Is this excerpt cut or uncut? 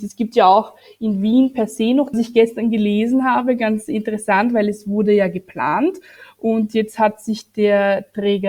cut